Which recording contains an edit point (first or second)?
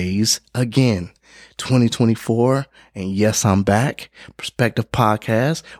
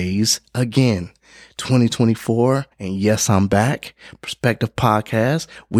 second